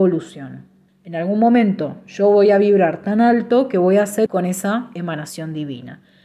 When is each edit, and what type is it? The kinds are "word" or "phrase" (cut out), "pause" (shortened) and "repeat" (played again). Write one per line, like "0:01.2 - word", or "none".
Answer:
0:04.3 - word